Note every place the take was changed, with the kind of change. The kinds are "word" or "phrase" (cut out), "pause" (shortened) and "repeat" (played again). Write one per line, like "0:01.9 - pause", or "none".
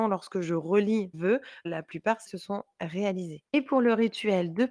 0:01.1 - word
0:01.6 - word
0:02.3 - word
0:03.5 - pause